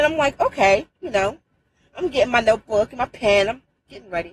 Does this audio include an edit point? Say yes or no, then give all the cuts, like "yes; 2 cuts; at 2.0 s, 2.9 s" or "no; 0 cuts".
no; 0 cuts